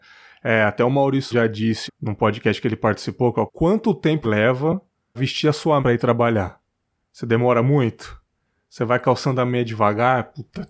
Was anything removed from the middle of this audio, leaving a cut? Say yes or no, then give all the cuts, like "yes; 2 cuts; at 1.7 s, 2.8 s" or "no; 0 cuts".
yes; 6 cuts; at 1.3 s, 1.9 s, 3.5 s, 4.2 s, 5.2 s, 5.8 s